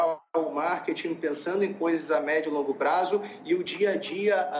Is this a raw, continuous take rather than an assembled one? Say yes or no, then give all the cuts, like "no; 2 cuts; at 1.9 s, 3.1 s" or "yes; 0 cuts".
yes; 0 cuts